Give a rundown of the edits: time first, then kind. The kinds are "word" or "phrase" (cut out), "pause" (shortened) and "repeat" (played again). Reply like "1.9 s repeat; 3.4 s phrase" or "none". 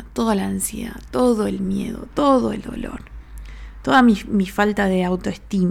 none